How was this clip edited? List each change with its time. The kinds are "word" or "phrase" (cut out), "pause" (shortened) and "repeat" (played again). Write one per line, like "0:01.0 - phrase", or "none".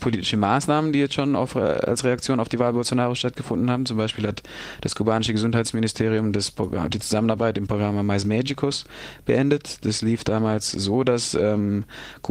0:07.7 - word

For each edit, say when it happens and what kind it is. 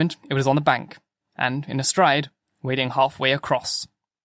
none

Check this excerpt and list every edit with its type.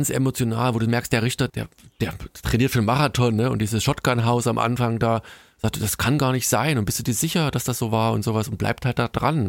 0:01.5 - word

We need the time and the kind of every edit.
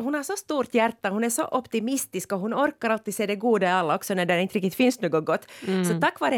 none

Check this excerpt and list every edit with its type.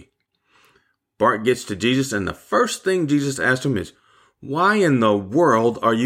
none

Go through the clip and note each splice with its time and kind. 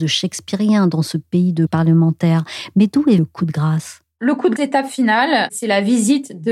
0:01.7 - word
0:03.2 - word
0:04.6 - word

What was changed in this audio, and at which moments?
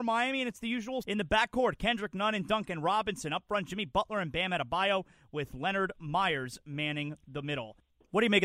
0:01.0 - word

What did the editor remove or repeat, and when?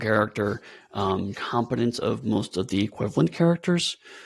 0:01.3 - phrase

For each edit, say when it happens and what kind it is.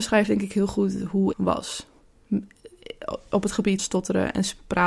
0:01.3 - word
0:03.8 - word

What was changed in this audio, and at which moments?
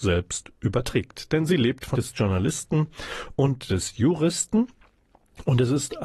0:01.9 - phrase

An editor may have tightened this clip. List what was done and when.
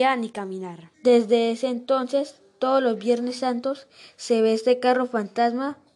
0:00.9 - pause

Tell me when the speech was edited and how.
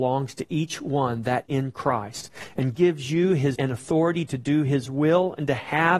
0:01.5 - word
0:02.8 - word
0:03.6 - word

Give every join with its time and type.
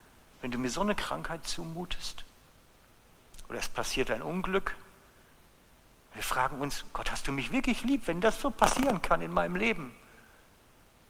none

